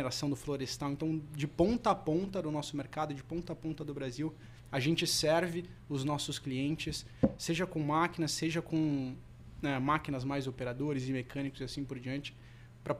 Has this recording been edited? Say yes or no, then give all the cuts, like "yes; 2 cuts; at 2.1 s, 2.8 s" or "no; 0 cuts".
no; 0 cuts